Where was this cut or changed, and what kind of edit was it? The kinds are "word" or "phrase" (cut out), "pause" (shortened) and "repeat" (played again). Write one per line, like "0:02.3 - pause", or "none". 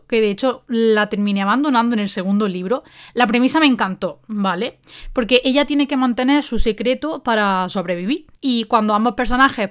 0:08.4 - pause